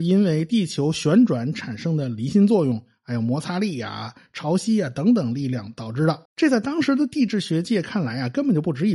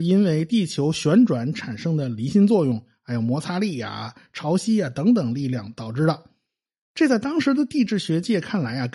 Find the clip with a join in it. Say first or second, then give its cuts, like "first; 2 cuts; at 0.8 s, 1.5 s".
first; 1 cut; at 6.3 s